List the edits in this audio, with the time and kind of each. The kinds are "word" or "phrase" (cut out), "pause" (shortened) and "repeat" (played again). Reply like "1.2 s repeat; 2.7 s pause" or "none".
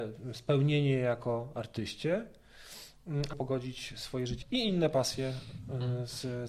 3.3 s phrase; 4.4 s word